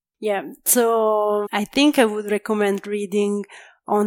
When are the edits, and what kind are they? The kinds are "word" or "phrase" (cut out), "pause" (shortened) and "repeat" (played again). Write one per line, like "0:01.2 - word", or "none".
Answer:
0:01.5 - word